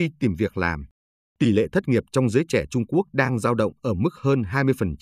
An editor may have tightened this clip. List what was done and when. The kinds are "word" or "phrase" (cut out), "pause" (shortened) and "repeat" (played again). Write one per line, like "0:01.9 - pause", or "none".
none